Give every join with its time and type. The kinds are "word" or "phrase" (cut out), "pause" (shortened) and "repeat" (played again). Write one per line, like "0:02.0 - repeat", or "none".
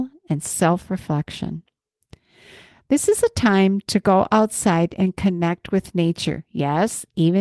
none